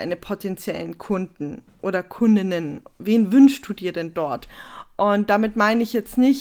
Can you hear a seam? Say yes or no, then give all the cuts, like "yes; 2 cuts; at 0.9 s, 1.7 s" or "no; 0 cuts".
no; 0 cuts